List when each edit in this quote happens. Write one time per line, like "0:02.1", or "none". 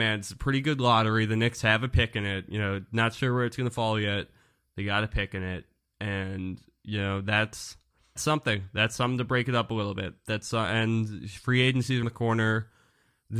0:08.2
0:12.0

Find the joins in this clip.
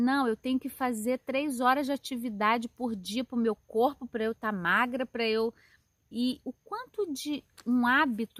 none

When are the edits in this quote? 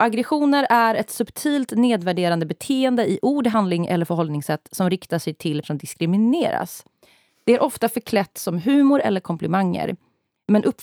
0:05.6

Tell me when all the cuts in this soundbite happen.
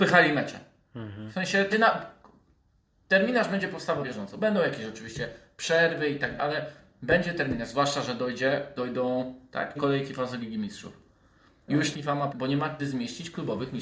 0:01.7
0:04.0
0:06.4
0:08.8
0:09.8
0:10.4
0:11.9
0:12.3
0:12.8

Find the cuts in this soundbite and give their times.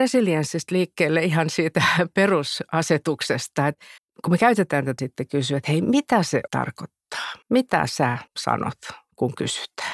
0:04.0
0:05.0
0:06.5
0:07.4
0:08.3

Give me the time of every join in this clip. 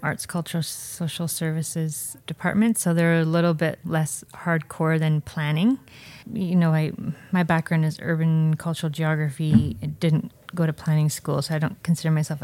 0:06.2

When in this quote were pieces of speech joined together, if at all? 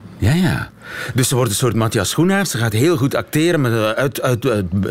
none

